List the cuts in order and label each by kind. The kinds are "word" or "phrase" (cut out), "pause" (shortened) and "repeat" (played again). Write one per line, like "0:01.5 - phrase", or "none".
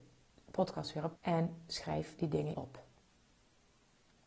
0:01.2 - word
0:02.5 - word